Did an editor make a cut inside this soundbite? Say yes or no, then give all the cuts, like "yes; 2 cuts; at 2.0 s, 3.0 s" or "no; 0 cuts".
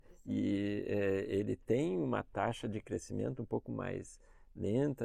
no; 0 cuts